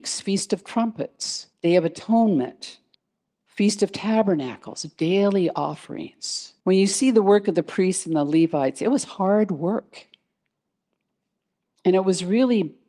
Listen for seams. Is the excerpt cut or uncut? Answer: cut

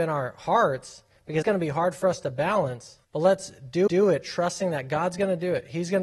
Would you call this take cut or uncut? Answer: cut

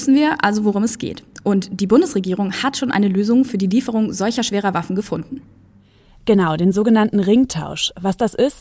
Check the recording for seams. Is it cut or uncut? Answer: uncut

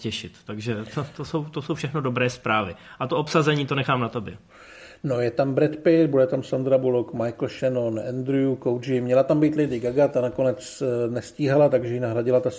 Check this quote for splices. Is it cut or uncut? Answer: uncut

